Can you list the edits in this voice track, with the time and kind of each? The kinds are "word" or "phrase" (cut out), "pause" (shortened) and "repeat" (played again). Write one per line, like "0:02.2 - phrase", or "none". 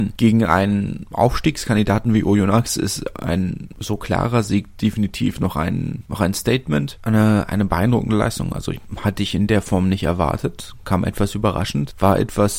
0:10.8 - word